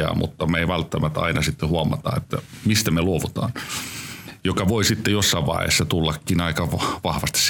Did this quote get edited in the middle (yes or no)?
no